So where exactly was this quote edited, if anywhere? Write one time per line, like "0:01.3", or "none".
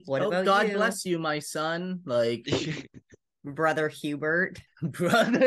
none